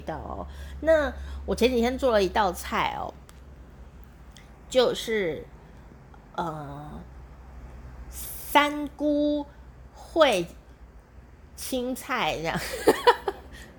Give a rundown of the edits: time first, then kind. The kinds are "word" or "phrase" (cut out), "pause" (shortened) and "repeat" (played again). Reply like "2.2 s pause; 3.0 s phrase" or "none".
none